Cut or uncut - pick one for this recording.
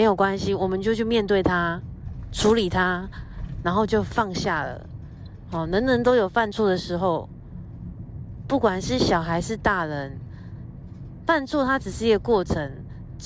uncut